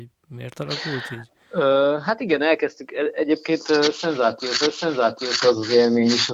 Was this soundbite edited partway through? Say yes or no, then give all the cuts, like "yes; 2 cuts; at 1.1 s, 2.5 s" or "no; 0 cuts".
yes; 1 cut; at 4.6 s